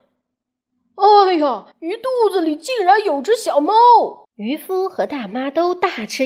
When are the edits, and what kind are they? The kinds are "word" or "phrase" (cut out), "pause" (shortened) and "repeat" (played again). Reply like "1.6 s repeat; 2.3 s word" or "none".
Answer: 1.7 s pause; 4.2 s pause